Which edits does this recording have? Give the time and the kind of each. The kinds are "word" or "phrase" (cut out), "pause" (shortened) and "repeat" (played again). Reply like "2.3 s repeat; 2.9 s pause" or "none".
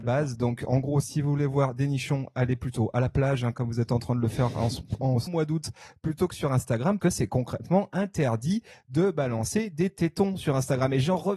5.3 s word; 7.0 s word